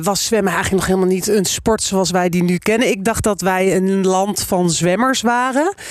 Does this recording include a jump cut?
no; 0 cuts

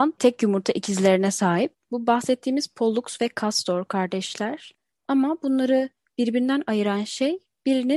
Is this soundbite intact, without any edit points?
yes; 0 cuts

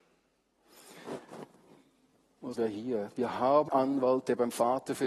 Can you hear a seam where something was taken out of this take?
yes; 2 cuts; at 2.6 s, 3.7 s

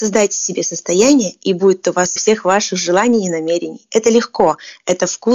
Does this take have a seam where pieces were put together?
yes; 1 cut; at 2.2 s

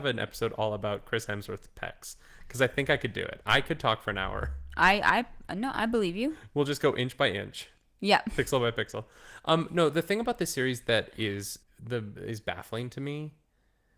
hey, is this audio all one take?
no; 1 cut; at 11.6 s

